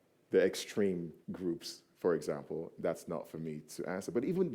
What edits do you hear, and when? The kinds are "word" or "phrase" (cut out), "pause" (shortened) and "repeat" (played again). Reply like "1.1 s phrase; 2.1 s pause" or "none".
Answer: 1.2 s pause